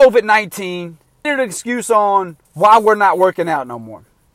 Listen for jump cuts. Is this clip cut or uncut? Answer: cut